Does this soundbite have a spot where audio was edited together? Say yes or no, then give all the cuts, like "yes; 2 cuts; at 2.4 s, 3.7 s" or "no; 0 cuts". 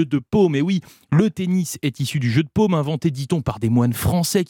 no; 0 cuts